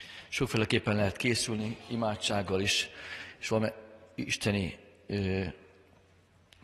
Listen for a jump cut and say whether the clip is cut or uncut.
uncut